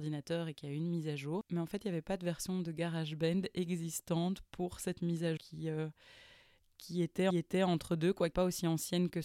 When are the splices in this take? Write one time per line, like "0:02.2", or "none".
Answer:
0:05.4
0:07.3
0:08.3